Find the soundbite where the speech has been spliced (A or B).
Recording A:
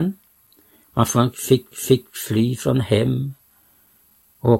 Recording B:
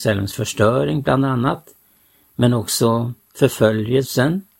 A